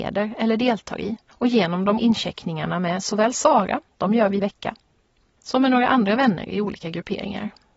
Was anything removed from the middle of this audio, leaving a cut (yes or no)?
yes